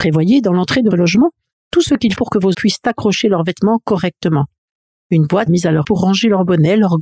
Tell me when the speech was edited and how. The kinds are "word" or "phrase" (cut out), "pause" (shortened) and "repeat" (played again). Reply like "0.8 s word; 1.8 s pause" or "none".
0.9 s word; 2.1 s word; 2.5 s word; 5.5 s word; 5.8 s word